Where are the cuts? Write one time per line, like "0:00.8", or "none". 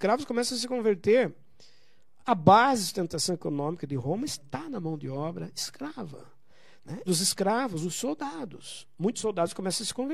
0:07.1